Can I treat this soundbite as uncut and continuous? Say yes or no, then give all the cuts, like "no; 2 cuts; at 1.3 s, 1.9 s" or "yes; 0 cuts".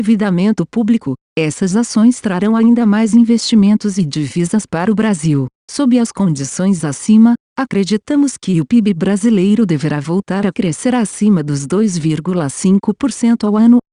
yes; 0 cuts